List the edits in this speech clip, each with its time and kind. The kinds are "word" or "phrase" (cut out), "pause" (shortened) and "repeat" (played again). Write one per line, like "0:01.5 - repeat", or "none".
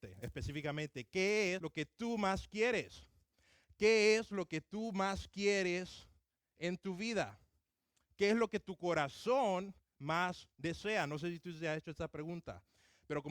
0:01.6 - word